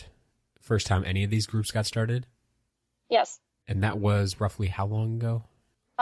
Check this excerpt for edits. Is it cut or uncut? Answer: uncut